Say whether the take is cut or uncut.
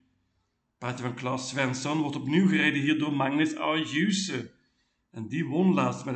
uncut